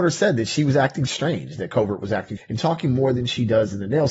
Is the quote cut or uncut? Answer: cut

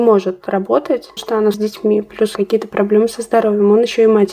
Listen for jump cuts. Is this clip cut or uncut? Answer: cut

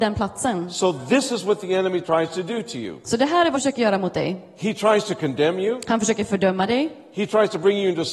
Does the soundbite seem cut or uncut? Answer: cut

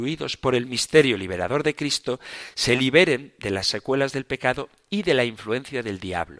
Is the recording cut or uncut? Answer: uncut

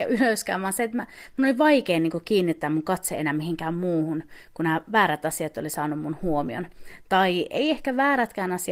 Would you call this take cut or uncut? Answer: uncut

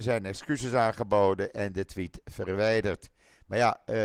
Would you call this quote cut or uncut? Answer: uncut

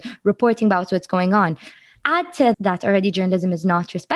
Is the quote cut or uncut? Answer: cut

